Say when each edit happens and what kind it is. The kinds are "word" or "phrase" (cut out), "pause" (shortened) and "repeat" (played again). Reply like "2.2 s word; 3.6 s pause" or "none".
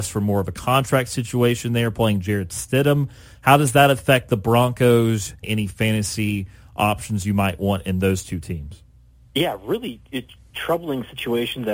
5.4 s phrase